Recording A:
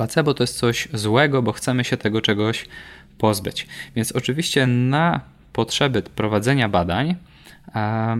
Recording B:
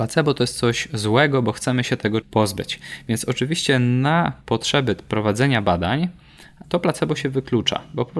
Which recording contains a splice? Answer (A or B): B